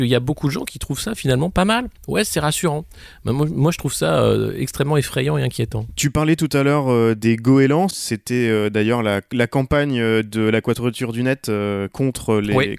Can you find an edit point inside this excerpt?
no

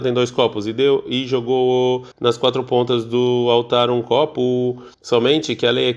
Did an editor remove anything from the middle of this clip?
yes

